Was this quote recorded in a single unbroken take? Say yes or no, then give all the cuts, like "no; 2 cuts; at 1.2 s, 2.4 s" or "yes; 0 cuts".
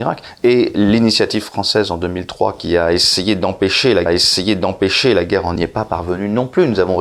no; 2 cuts; at 4.1 s, 5.6 s